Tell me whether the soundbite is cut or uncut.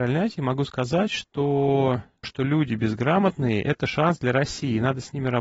cut